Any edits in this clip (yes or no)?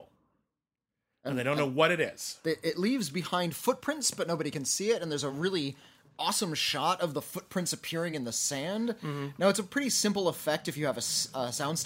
no